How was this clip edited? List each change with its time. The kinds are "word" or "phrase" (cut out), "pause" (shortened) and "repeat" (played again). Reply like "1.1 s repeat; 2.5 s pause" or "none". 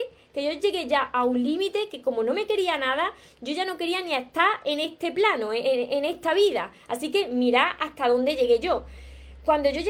none